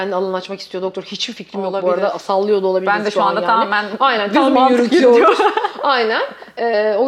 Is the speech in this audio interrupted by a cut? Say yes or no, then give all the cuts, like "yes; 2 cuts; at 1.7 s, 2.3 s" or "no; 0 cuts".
no; 0 cuts